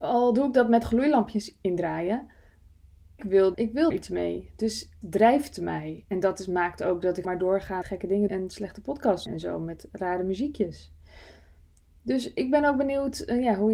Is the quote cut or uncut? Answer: cut